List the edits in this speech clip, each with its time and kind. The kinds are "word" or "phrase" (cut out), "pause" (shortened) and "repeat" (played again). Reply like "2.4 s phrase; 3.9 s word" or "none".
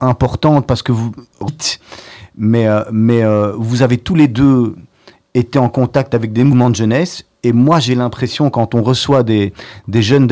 none

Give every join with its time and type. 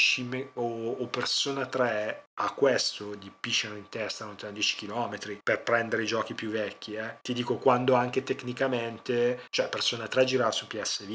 2.3 s pause; 5.4 s pause; 7.2 s pause; 9.5 s pause

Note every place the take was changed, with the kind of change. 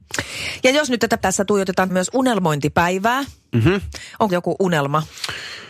1.2 s word; 1.9 s phrase; 4.3 s word

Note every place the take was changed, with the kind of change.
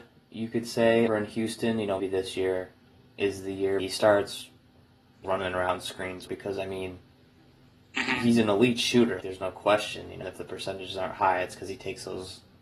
1.1 s word; 2.0 s word; 3.8 s word; 5.2 s word; 6.3 s word; 9.2 s word; 10.2 s word

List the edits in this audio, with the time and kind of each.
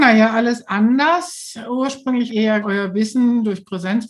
2.3 s word; 2.6 s word

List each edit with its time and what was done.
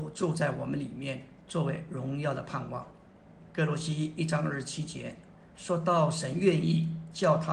none

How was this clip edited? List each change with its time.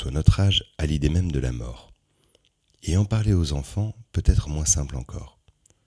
none

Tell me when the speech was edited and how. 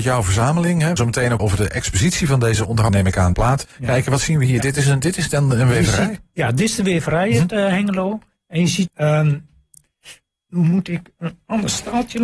1.0 s word; 1.4 s word; 2.9 s word; 3.3 s word; 3.6 s word; 8.9 s word

